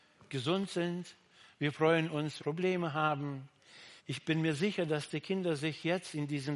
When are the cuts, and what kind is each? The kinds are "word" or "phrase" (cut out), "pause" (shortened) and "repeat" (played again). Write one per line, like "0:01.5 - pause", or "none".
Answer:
0:02.4 - phrase
0:04.0 - pause